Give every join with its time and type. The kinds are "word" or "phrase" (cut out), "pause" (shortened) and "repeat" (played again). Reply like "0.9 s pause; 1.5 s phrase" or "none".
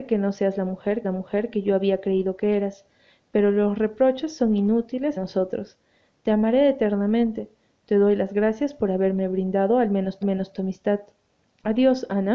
1.0 s repeat; 5.2 s word; 10.2 s repeat